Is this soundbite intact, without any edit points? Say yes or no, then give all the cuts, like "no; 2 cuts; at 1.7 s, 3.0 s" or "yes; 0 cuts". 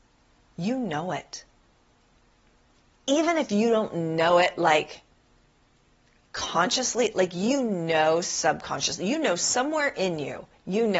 yes; 0 cuts